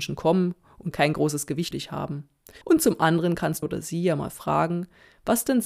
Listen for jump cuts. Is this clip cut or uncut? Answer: cut